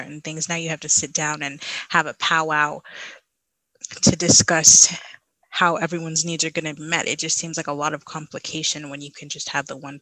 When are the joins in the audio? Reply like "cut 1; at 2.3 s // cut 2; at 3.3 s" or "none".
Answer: cut 1; at 6.8 s

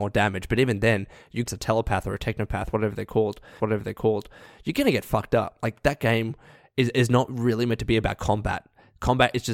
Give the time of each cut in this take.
cut 1; at 1.5 s // cut 2; at 3.6 s

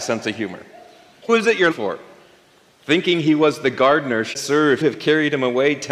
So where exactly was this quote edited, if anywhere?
cut 1; at 1.3 s // cut 2; at 1.7 s // cut 3; at 4.3 s // cut 4; at 4.8 s

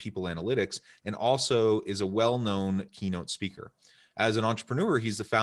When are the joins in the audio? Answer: none

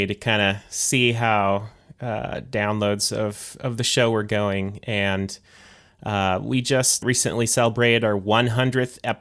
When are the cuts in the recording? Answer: cut 1; at 7.0 s

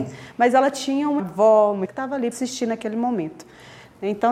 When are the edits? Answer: cut 1; at 1.2 s // cut 2; at 1.9 s // cut 3; at 2.3 s

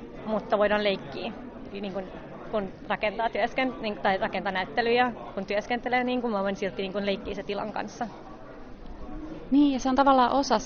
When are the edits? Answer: none

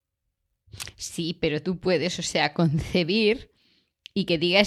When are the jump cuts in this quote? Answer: none

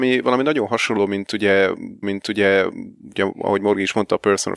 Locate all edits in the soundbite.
cut 1; at 2.0 s

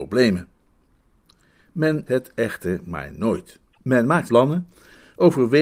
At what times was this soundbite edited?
cut 1; at 2.1 s // cut 2; at 4.3 s

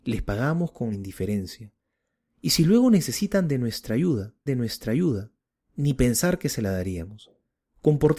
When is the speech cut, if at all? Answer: cut 1; at 0.9 s // cut 2; at 4.5 s

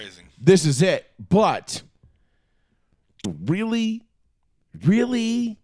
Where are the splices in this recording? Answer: cut 1; at 3.2 s

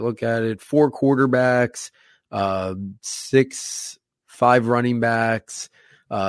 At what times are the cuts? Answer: none

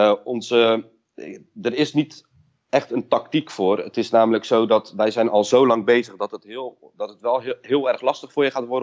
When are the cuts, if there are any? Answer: none

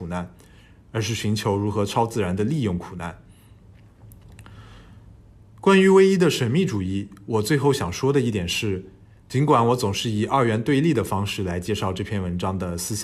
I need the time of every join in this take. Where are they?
none

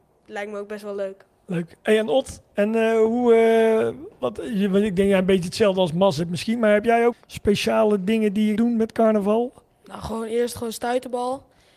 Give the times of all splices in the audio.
cut 1; at 7.1 s // cut 2; at 8.6 s

